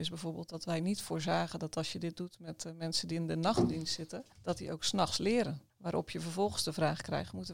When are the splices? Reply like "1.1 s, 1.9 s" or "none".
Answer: 4.3 s, 5.7 s

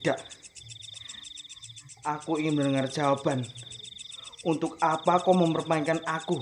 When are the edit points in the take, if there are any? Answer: none

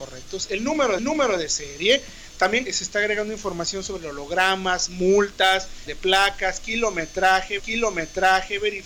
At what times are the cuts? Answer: 1.0 s, 2.7 s, 5.9 s, 7.6 s

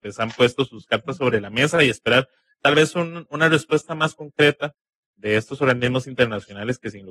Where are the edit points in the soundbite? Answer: none

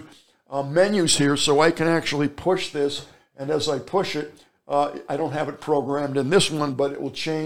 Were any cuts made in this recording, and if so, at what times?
none

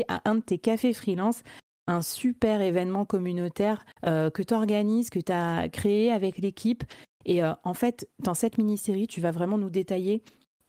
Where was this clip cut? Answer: 3.9 s

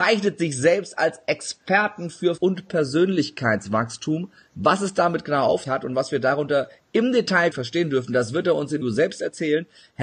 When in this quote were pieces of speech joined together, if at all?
2.4 s, 5.7 s, 7.5 s, 8.8 s

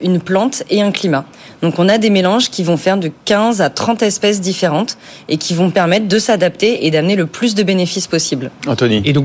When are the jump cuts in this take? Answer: none

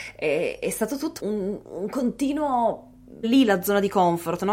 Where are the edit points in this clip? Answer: 1.2 s, 3.2 s

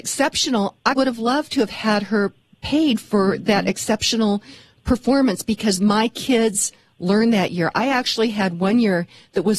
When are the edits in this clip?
0.9 s

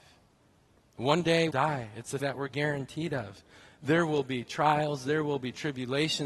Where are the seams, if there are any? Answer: 1.5 s, 2.2 s

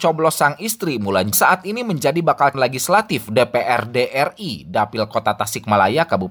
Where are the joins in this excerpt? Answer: 1.3 s, 2.5 s

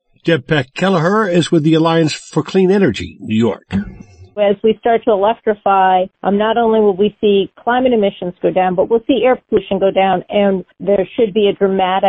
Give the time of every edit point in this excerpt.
none

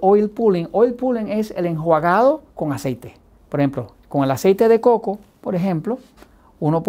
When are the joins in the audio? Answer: 2.5 s, 3.4 s, 4.0 s

